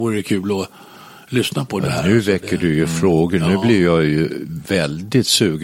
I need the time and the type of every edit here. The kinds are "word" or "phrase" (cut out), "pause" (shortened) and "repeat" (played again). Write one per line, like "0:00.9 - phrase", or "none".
none